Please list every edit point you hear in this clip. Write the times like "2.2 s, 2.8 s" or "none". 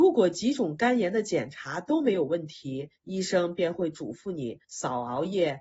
3.0 s, 4.6 s